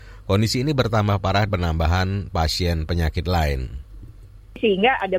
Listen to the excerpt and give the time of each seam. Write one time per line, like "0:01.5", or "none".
0:01.5